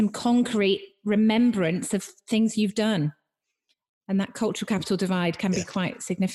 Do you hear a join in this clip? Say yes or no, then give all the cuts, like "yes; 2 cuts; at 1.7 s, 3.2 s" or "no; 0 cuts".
no; 0 cuts